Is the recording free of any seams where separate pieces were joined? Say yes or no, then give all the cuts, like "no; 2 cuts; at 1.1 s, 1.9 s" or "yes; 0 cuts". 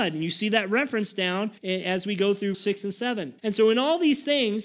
no; 3 cuts; at 1.6 s, 2.5 s, 3.4 s